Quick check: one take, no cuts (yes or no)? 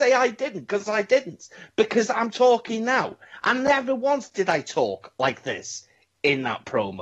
yes